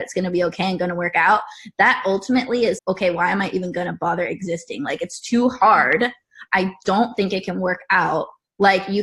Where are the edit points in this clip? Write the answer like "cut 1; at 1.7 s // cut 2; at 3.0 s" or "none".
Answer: cut 1; at 2.8 s

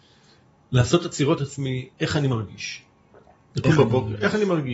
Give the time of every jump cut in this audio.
cut 1; at 1.4 s // cut 2; at 1.9 s

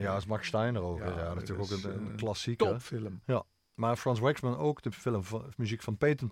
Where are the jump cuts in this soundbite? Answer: none

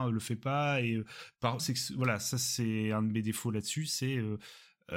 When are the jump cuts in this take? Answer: cut 1; at 1.6 s

